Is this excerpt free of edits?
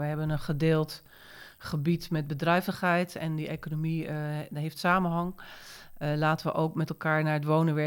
yes; 0 cuts

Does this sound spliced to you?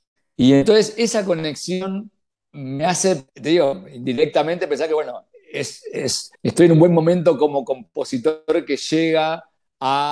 yes; 2 cuts; at 3.3 s, 6.3 s

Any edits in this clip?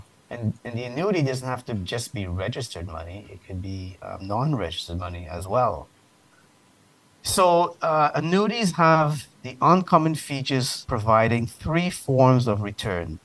yes; 1 cut; at 10.8 s

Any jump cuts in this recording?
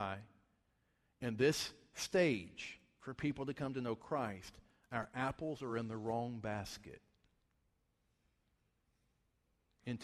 no; 0 cuts

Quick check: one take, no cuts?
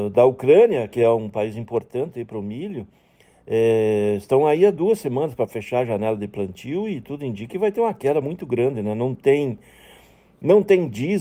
yes; 0 cuts

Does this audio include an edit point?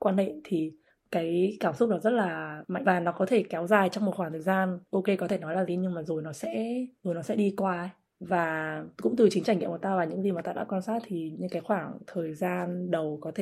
yes; 4 cuts; at 2.8 s, 5.7 s, 7.0 s, 8.9 s

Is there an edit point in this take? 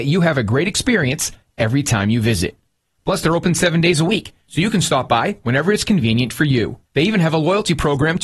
yes; 1 cut; at 6.9 s

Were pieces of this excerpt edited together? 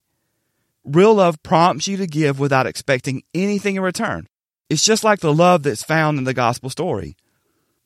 yes; 1 cut; at 4.5 s

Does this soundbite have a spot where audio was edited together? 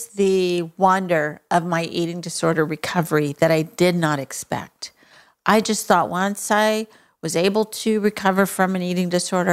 no; 0 cuts

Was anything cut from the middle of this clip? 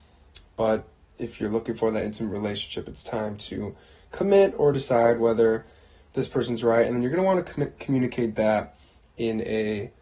no; 0 cuts

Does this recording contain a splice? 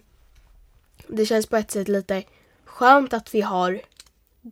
no; 0 cuts

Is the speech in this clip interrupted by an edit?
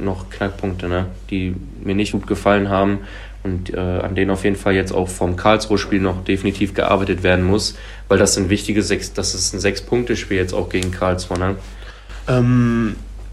yes; 1 cut; at 2.1 s

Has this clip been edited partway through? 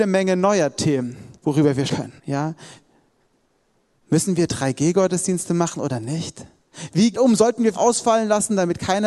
yes; 5 cuts; at 1.4 s, 1.9 s, 2.2 s, 7.1 s, 7.7 s

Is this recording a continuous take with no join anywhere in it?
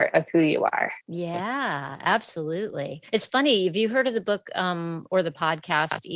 no; 2 cuts; at 1.0 s, 3.1 s

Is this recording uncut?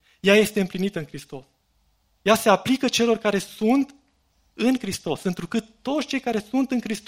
yes; 0 cuts

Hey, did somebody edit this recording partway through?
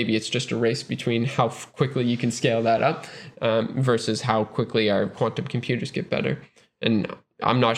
no; 0 cuts

